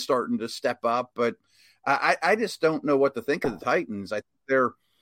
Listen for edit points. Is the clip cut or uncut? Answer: uncut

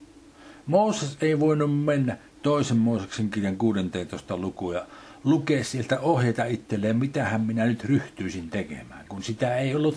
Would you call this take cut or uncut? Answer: uncut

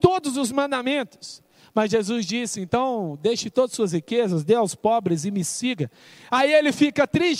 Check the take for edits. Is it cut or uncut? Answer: uncut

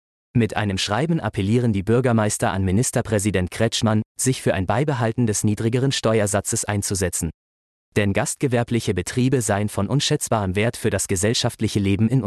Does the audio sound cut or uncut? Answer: uncut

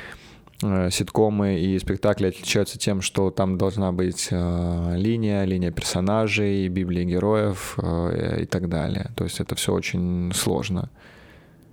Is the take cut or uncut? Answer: uncut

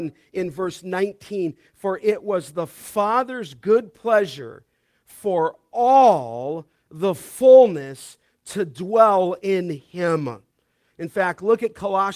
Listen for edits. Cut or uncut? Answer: uncut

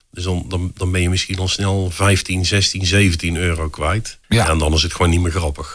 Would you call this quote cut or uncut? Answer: cut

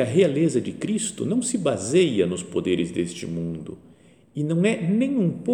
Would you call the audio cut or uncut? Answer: uncut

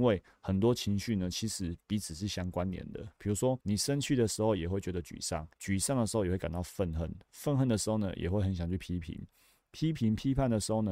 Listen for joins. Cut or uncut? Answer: cut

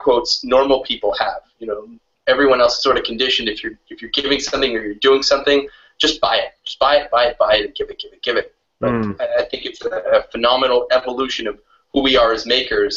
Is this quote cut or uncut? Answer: uncut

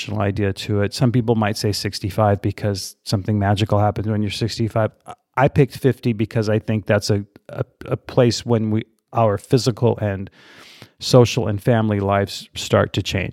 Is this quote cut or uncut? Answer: uncut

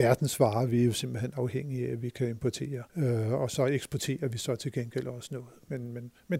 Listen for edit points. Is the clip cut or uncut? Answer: cut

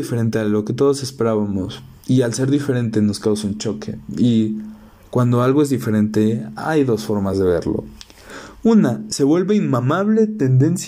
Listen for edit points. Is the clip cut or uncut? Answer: uncut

